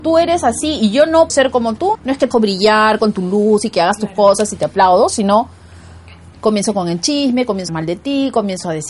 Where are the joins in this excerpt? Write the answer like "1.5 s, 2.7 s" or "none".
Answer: 1.3 s, 1.9 s, 2.3 s, 7.7 s

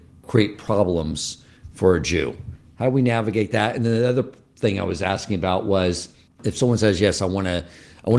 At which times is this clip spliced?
none

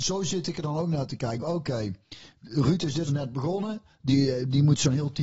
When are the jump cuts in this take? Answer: 1.4 s, 3.1 s

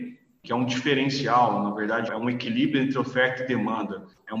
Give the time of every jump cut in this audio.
2.1 s

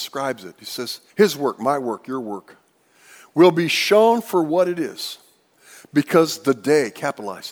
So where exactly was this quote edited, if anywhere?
1.1 s

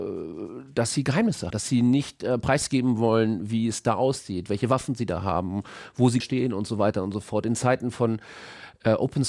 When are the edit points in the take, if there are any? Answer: 1.5 s, 6.2 s

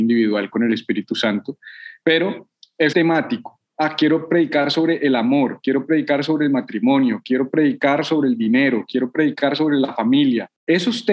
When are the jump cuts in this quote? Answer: 2.9 s

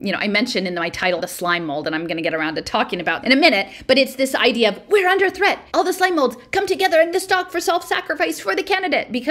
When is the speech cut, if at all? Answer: 1.2 s, 3.2 s, 5.7 s, 7.1 s

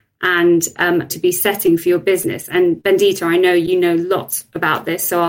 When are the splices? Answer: 1.1 s

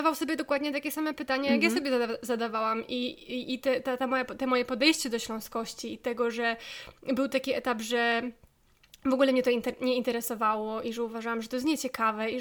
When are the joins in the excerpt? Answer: none

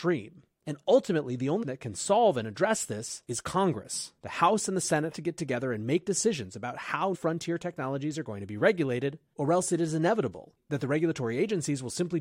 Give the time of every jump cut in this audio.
1.6 s, 4.2 s, 5.1 s, 7.1 s

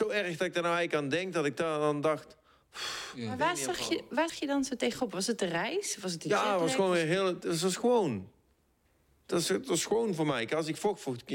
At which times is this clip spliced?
4.3 s

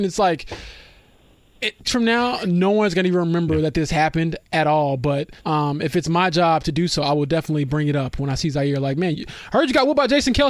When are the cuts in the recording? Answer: 1.8 s, 5.4 s, 9.1 s

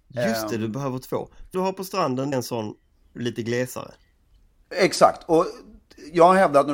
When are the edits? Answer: 1.5 s, 2.3 s

